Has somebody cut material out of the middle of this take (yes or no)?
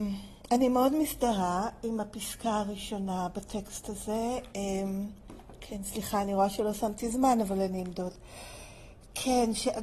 no